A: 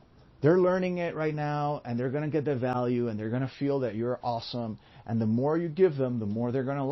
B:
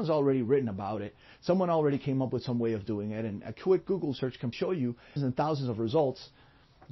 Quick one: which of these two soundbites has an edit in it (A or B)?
B